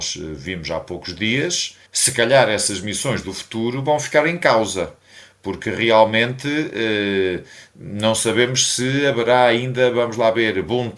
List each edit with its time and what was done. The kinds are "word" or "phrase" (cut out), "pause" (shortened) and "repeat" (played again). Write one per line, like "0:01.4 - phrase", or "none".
0:01.9 - pause

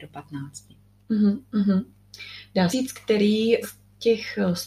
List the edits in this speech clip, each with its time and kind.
0:02.7 - word
0:03.6 - word

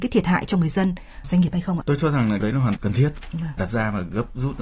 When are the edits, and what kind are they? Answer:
0:01.2 - word
0:01.8 - word
0:02.4 - word
0:02.8 - word
0:03.6 - word

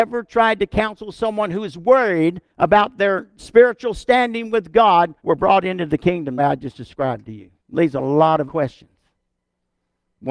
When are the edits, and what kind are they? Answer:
0:02.5 - pause
0:05.2 - pause
0:06.4 - phrase
0:07.6 - pause
0:08.5 - word

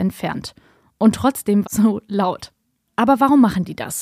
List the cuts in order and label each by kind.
0:01.6 - phrase

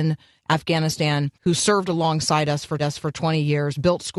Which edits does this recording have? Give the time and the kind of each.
0:01.3 - pause
0:02.8 - repeat

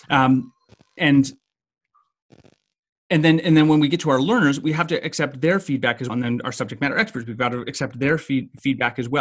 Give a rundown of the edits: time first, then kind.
0:01.0 - word
0:06.1 - word

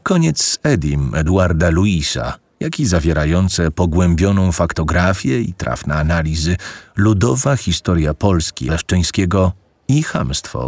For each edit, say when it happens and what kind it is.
0:08.7 - word

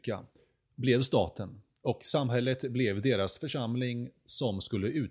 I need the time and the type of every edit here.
none

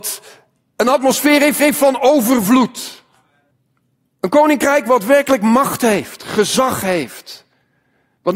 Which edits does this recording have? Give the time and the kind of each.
0:01.6 - repeat
0:03.5 - pause

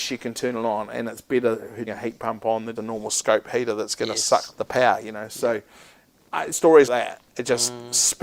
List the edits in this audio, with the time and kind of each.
0:01.9 - word
0:02.8 - word
0:04.5 - word
0:06.5 - word
0:06.9 - word

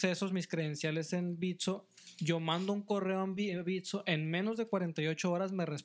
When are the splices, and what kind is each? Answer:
none

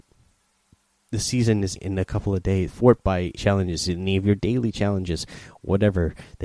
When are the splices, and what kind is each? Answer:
0:01.8 - word
0:02.7 - word
0:03.4 - phrase

